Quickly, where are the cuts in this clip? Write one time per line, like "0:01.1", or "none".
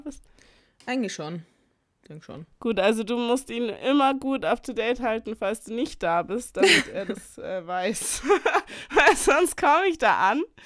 none